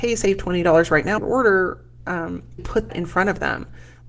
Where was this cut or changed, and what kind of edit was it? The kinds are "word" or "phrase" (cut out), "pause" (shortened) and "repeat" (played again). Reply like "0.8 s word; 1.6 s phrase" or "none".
1.2 s word; 2.6 s word; 2.9 s word